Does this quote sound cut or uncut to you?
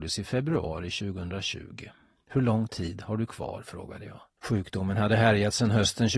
uncut